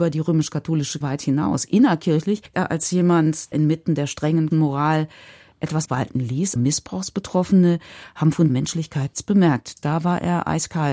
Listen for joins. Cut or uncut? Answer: cut